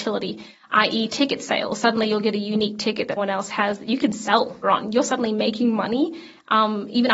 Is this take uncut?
no; 2 cuts; at 3.2 s, 4.6 s

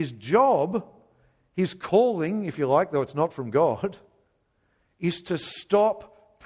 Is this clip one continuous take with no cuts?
yes; 0 cuts

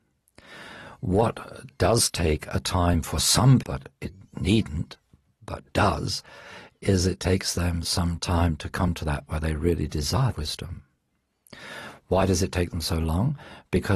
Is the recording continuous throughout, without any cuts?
no; 3 cuts; at 3.6 s, 9.3 s, 10.3 s

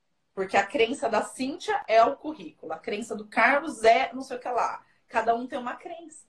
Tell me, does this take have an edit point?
no; 0 cuts

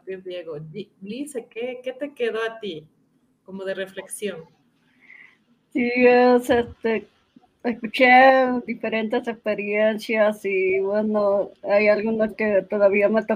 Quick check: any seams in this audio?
no; 0 cuts

